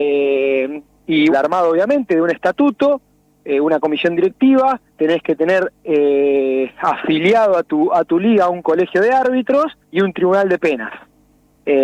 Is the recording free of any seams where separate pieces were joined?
no; 3 cuts; at 1.3 s, 4.9 s, 9.8 s

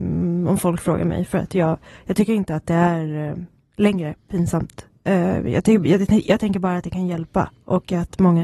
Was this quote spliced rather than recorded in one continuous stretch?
no; 0 cuts

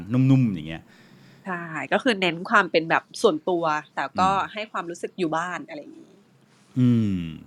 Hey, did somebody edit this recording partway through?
yes; 1 cut; at 3.9 s

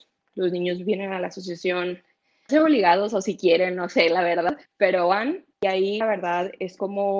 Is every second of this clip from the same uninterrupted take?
no; 4 cuts; at 2.5 s, 4.7 s, 5.5 s, 6.0 s

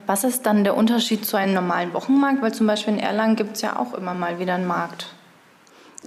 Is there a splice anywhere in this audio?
no; 0 cuts

